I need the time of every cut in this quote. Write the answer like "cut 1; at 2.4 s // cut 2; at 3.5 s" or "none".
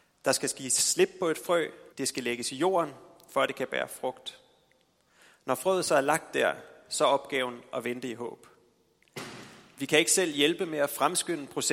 cut 1; at 1.9 s